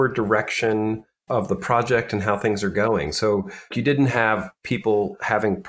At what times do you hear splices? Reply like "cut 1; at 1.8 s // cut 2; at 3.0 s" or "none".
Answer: cut 1; at 1.3 s // cut 2; at 3.7 s